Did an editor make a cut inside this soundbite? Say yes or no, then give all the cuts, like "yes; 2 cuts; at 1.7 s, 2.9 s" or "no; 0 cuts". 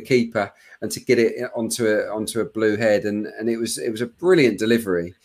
no; 0 cuts